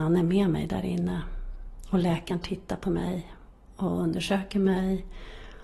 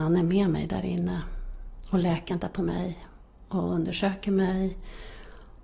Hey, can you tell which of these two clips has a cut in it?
second; 1 cut; at 2.4 s

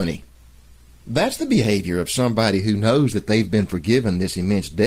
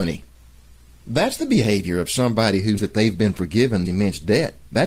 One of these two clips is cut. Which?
second; 2 cuts; at 2.8 s, 3.8 s

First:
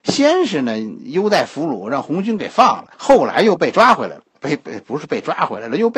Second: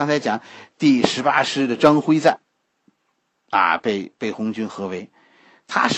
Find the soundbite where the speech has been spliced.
first; 1 cut; at 2.9 s

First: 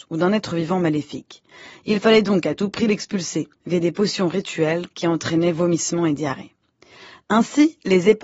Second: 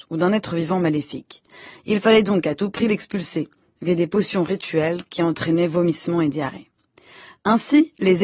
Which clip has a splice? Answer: first; 1 cut; at 3.6 s

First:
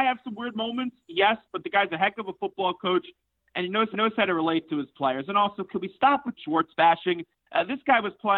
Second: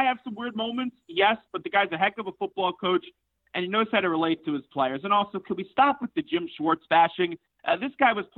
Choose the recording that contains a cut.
first; 2 cuts; at 3.9 s, 6.4 s

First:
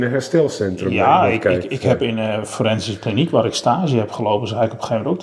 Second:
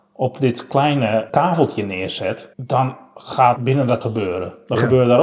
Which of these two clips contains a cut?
second; 4 cuts; at 1.3 s, 2.5 s, 3.6 s, 4.0 s

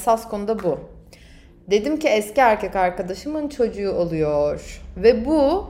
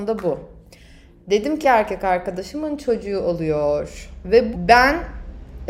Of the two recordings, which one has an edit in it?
second; 2 cuts; at 1.6 s, 4.5 s

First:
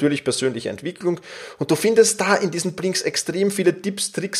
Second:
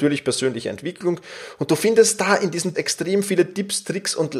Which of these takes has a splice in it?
second; 1 cut; at 2.7 s

